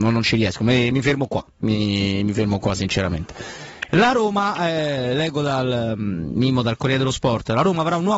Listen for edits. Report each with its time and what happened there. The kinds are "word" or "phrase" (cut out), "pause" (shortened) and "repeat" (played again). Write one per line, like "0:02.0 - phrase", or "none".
0:00.9 - word
0:01.5 - pause